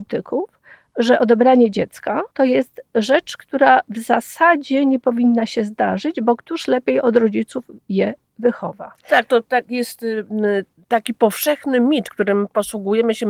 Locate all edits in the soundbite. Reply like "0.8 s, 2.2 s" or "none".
2.3 s, 9.0 s

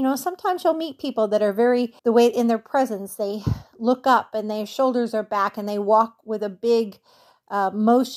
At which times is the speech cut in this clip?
2.0 s

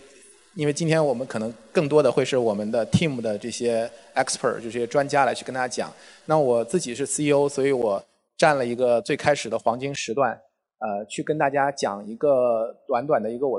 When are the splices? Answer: none

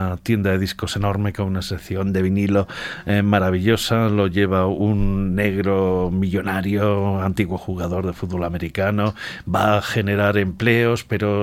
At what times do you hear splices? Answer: none

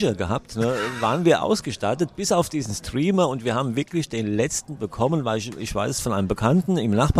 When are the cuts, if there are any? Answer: none

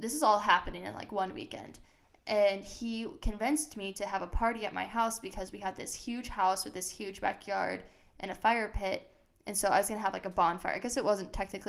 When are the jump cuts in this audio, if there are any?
none

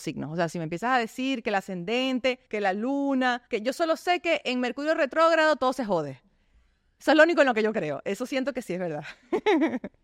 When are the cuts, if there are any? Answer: 2.5 s, 3.5 s

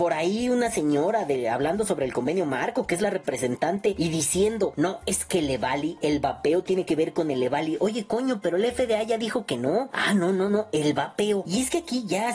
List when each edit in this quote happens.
none

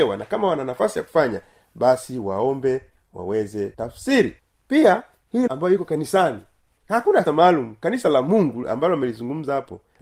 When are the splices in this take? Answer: 3.7 s, 5.5 s, 7.3 s

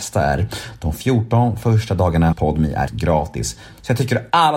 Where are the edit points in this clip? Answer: 2.3 s, 2.9 s

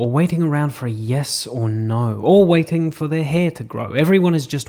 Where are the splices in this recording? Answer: none

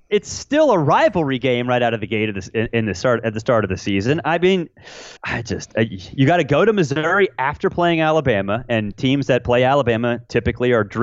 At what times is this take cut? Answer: 5.2 s

